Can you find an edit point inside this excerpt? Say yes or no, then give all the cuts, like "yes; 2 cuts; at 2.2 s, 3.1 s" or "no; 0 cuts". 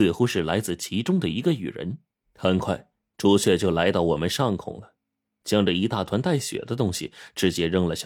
yes; 1 cut; at 2.1 s